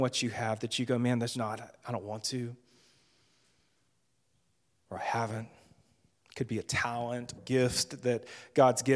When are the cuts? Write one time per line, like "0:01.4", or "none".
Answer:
0:01.3
0:07.3